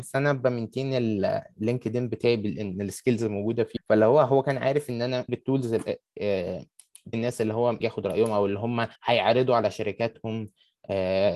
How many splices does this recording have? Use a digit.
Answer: 5